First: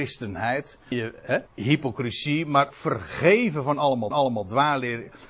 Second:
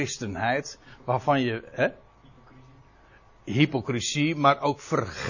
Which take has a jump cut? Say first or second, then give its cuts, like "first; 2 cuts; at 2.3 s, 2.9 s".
first; 4 cuts; at 0.9 s, 1.5 s, 2.7 s, 4.1 s